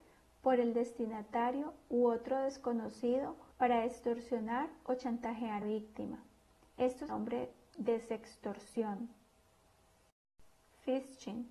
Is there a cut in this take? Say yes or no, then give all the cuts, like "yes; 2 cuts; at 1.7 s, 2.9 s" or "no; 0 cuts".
yes; 3 cuts; at 3.5 s, 5.6 s, 7.1 s